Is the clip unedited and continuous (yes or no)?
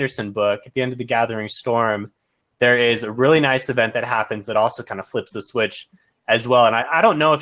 yes